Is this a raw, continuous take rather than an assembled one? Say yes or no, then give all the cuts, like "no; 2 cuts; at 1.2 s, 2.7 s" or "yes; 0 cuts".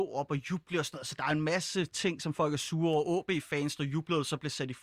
yes; 0 cuts